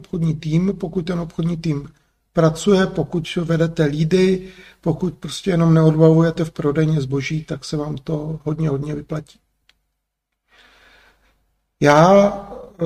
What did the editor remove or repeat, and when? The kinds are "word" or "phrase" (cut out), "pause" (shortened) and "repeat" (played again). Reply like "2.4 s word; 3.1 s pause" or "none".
none